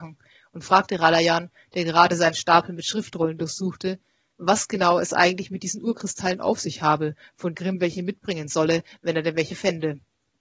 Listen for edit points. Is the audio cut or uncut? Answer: cut